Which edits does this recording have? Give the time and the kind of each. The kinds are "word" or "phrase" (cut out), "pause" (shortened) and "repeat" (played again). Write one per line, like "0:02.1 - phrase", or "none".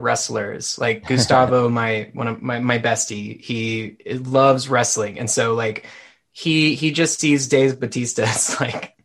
none